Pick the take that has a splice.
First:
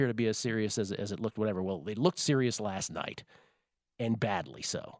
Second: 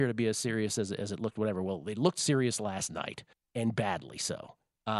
second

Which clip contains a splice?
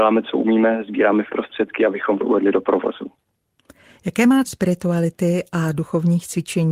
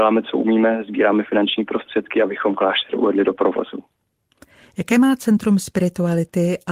first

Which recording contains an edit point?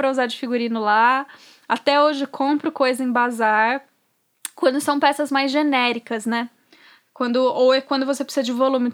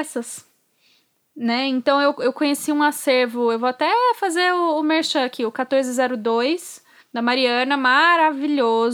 second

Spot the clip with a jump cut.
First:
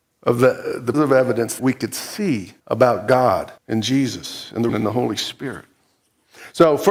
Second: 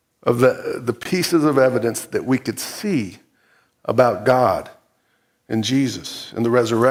first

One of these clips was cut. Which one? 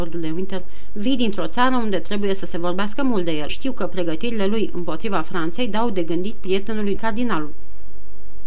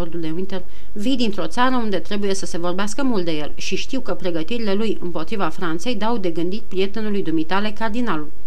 first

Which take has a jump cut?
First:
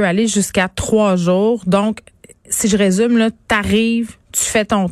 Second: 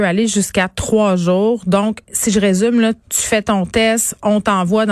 second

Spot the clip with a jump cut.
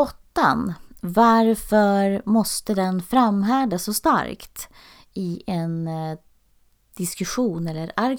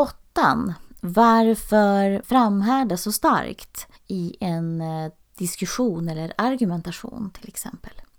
second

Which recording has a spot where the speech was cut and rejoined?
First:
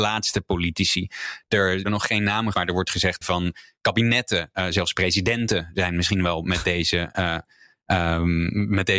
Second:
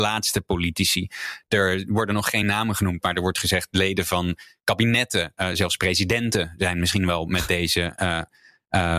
first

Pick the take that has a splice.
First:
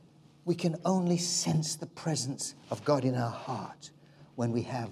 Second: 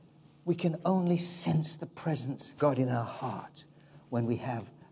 second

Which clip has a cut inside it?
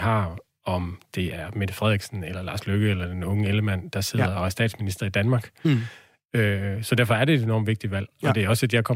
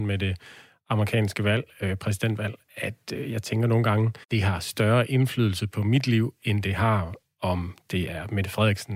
second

